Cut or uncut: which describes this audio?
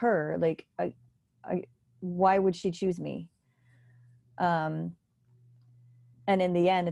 uncut